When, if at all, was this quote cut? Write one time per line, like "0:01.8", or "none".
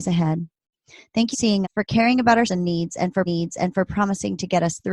0:01.3
0:01.6
0:02.5
0:03.3

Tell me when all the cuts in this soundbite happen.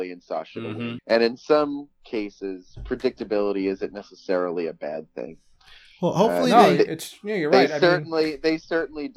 0:01.0

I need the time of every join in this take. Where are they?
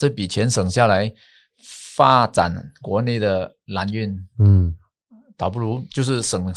none

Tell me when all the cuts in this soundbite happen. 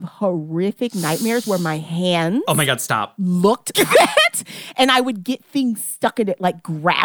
0:03.7

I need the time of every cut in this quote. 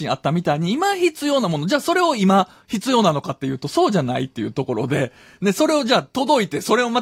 none

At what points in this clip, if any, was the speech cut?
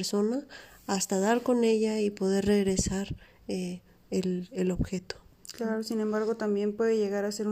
none

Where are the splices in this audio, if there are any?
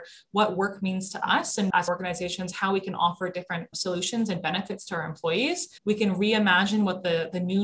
0:05.8

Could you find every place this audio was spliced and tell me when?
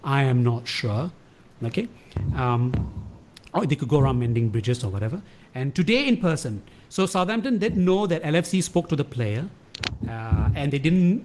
none

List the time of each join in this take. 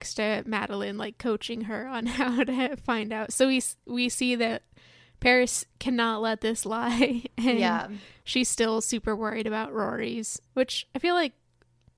0:10.5

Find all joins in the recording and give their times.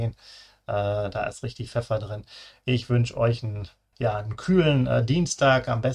0:03.9

